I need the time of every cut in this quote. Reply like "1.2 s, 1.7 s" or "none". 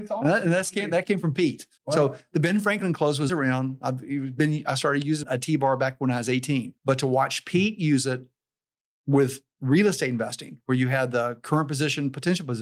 1.8 s, 3.3 s, 5.2 s, 6.8 s